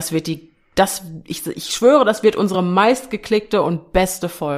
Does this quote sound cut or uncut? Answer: uncut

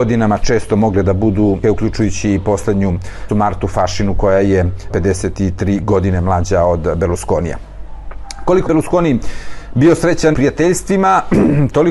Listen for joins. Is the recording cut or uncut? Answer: cut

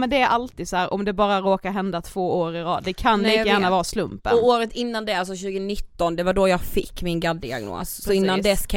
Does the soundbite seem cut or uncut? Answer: uncut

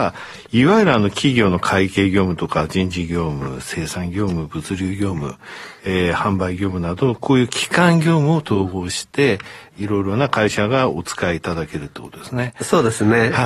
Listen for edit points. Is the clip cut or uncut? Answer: uncut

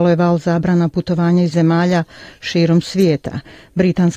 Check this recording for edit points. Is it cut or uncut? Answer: cut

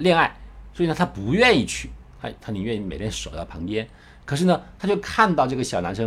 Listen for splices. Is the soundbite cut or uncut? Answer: uncut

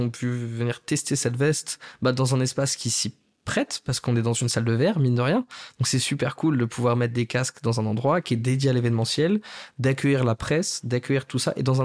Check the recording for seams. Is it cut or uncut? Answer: uncut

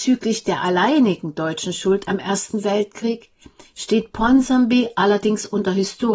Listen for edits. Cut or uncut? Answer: uncut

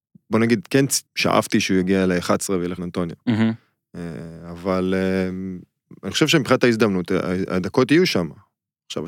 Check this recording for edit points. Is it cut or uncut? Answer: cut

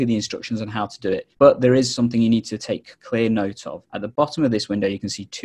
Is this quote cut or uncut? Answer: cut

